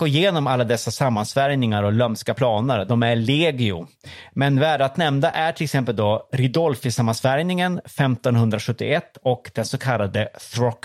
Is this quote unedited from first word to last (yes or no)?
yes